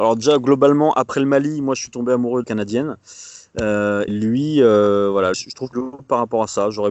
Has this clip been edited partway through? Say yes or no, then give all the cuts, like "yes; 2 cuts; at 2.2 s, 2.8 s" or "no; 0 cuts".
yes; 4 cuts; at 2.4 s, 4.1 s, 5.3 s, 5.7 s